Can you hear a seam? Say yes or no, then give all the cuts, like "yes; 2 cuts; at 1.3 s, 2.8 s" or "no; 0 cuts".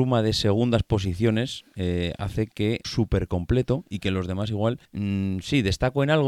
yes; 2 cuts; at 2.8 s, 4.9 s